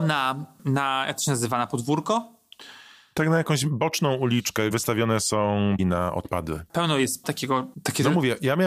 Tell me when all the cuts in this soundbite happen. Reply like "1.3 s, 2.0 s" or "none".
4.7 s, 5.8 s, 7.2 s